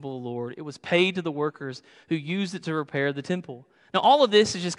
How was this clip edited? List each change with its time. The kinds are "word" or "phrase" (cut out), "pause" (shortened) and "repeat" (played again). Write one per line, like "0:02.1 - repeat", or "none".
none